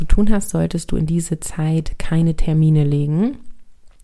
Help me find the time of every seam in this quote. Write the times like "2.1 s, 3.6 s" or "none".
none